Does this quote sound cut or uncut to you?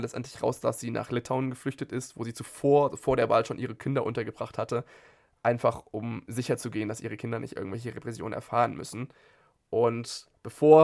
uncut